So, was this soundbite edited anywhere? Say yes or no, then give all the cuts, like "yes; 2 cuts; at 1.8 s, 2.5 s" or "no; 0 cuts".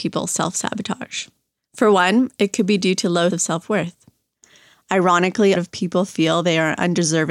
yes; 2 cuts; at 3.3 s, 5.6 s